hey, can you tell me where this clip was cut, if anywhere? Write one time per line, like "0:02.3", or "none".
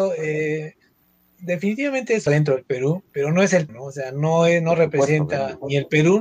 0:02.3
0:03.1
0:03.7